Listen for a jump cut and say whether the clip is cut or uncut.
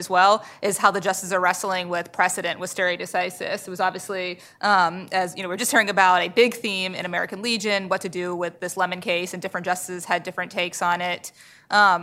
uncut